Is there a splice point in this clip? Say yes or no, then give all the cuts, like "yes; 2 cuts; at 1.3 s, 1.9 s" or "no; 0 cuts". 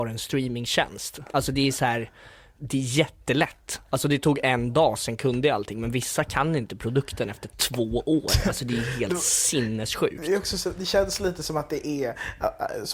no; 0 cuts